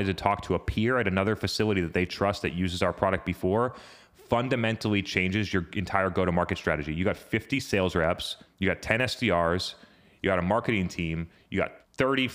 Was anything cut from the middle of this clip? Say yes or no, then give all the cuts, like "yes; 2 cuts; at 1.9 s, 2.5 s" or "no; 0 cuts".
no; 0 cuts